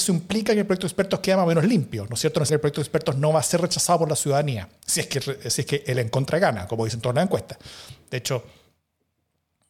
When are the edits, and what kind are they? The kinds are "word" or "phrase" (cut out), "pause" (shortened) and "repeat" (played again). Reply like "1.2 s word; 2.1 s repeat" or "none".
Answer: 2.5 s word